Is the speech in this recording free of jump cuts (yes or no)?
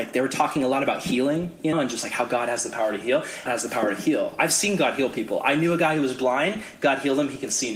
no